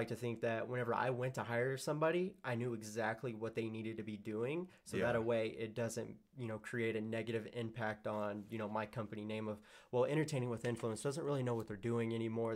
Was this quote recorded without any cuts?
yes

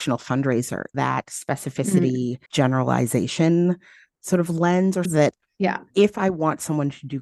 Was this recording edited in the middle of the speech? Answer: yes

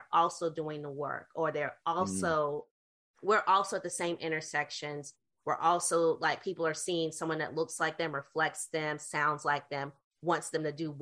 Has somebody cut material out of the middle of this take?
no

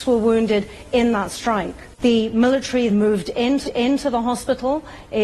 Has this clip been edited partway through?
yes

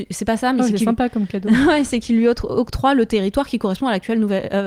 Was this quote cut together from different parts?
no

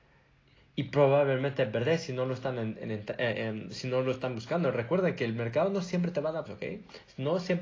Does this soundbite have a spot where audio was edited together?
yes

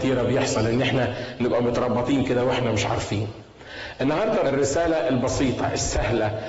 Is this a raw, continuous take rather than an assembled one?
no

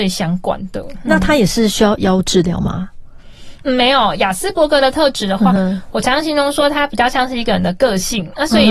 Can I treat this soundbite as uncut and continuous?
yes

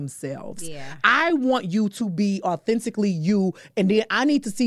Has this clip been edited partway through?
no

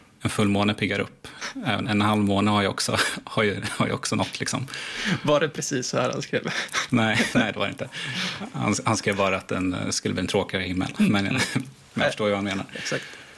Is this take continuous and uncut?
no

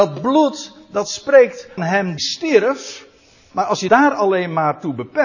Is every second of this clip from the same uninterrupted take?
no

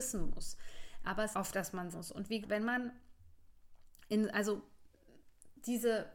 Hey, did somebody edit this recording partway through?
yes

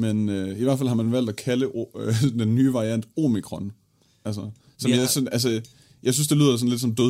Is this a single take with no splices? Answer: yes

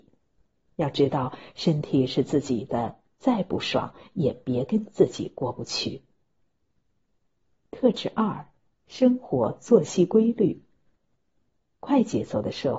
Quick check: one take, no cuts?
yes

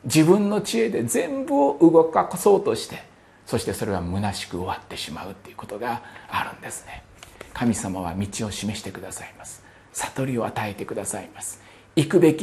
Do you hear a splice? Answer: no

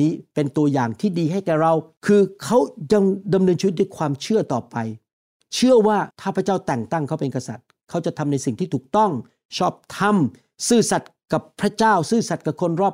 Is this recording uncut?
no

